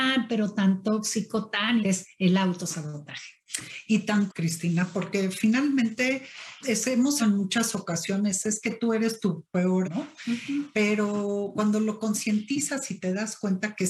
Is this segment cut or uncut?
cut